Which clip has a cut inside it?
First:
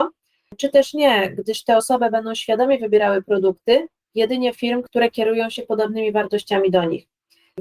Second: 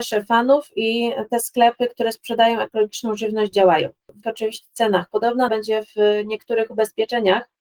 second; 2 cuts; at 4.2 s, 5.5 s

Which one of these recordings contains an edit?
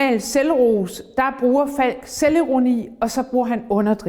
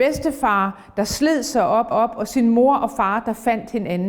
second; 1 cut; at 1.9 s

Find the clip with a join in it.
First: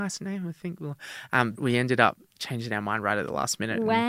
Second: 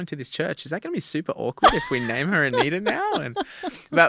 first; 1 cut; at 1.5 s

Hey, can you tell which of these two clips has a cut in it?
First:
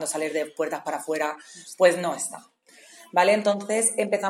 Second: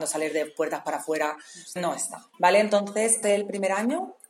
second; 3 cuts; at 1.8 s, 2.3 s, 3.2 s

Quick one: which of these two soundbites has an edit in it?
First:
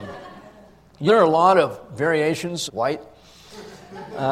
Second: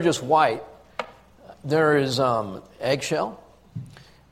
first; 2 cuts; at 1.1 s, 2.7 s

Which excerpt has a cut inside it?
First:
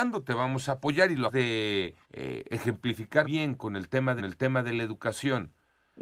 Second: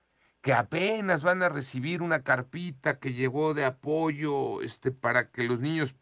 first; 5 cuts; at 1.3 s, 2.0 s, 3.2 s, 3.6 s, 4.2 s

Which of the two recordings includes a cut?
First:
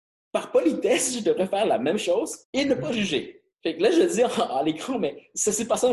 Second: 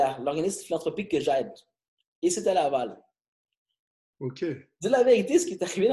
first; 2 cuts; at 2.4 s, 3.5 s

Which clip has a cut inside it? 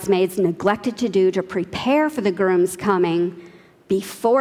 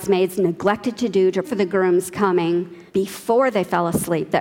second; 2 cuts; at 1.4 s, 2.9 s

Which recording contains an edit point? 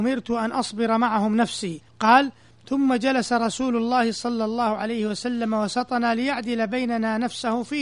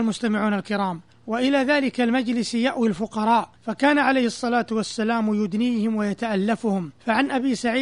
first; 1 cut; at 1.9 s

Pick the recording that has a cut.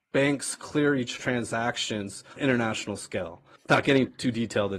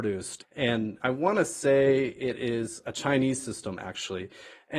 first; 2 cuts; at 1.2 s, 2.4 s

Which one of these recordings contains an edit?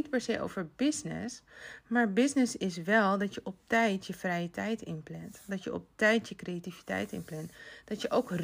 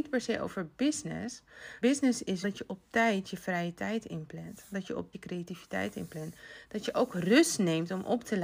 second; 3 cuts; at 1.8 s, 2.4 s, 5.1 s

